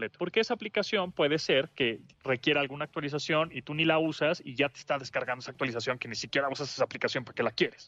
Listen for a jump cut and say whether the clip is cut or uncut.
uncut